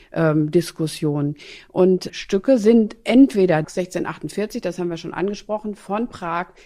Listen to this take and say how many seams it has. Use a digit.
2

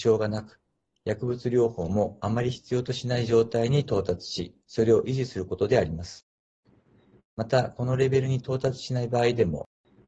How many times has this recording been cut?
1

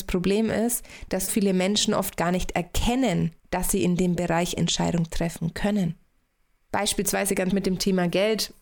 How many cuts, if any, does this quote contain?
5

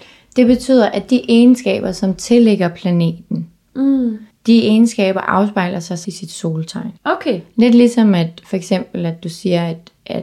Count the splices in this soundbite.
3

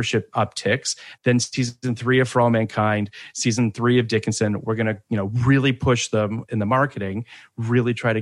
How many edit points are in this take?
1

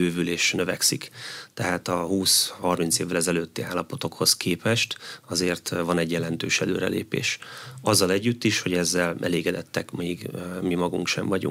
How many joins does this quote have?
0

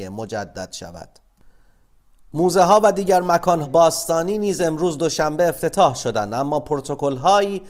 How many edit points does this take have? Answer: 1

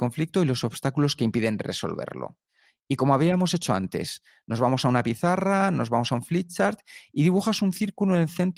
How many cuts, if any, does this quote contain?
0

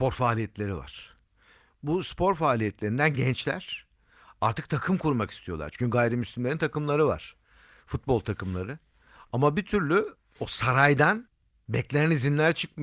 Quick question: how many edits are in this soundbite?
0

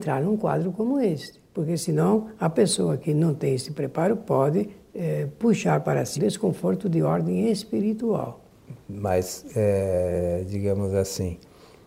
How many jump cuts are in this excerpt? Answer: 1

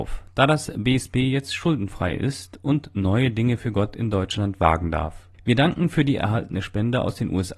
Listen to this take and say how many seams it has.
1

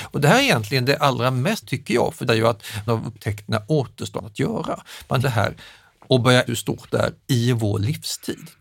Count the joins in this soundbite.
6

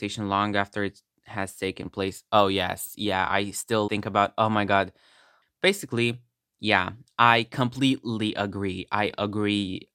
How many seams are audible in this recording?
1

